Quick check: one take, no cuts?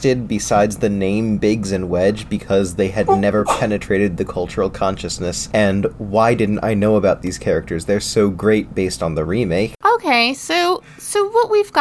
yes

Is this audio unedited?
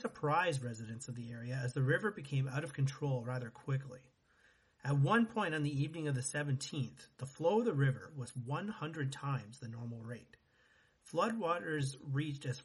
yes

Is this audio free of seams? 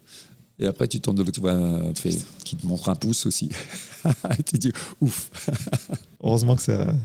no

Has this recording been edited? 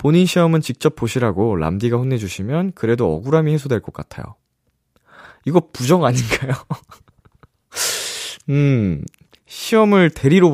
no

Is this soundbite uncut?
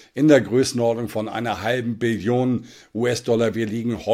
yes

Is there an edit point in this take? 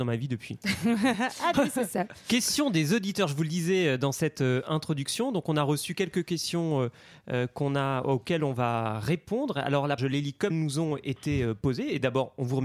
yes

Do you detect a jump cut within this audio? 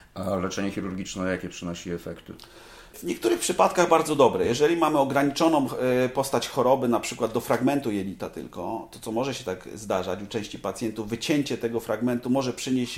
yes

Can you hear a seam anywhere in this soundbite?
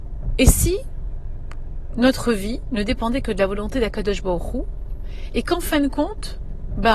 no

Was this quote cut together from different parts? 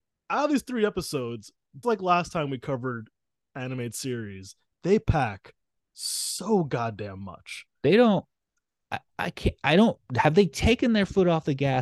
yes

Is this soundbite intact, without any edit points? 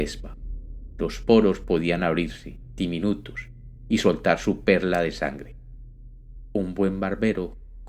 yes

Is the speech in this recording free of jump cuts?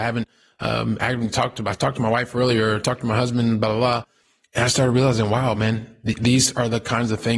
yes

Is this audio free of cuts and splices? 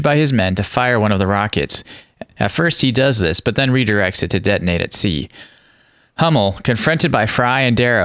yes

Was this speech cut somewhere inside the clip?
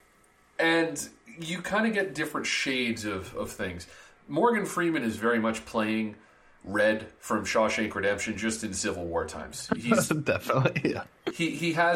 no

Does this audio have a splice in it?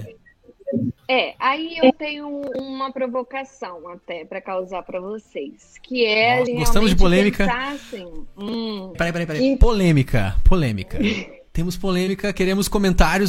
yes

